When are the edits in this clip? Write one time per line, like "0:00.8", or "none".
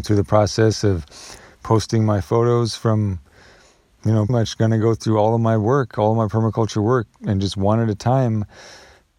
0:04.3

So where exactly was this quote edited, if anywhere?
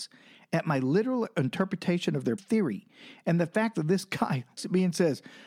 0:02.4
0:04.6

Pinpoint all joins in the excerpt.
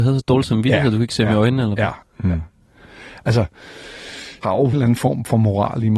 0:02.0
0:04.4
0:04.7

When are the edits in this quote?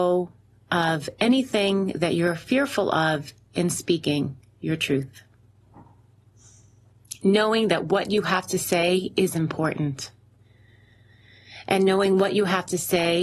none

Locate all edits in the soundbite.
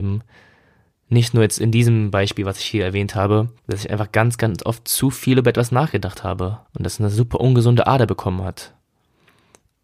0:03.6
0:06.6

